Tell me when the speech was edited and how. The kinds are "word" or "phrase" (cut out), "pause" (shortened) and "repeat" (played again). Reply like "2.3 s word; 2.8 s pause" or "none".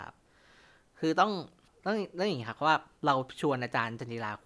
none